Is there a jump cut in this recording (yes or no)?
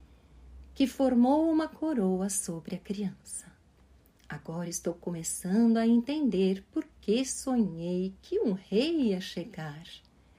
no